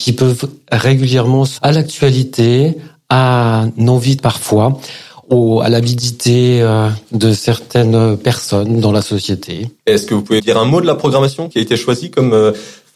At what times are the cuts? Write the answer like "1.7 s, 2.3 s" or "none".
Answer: 1.6 s, 4.2 s, 10.4 s, 11.5 s